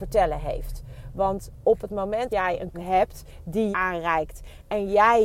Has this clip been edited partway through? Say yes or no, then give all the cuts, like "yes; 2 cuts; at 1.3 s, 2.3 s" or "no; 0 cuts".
yes; 3 cuts; at 2.3 s, 2.7 s, 3.7 s